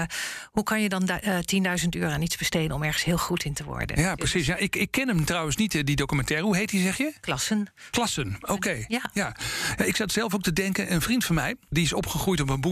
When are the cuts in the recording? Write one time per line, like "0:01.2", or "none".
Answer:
none